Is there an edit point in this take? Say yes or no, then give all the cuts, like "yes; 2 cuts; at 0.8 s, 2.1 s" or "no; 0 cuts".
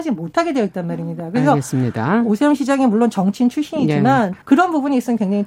yes; 1 cut; at 4.4 s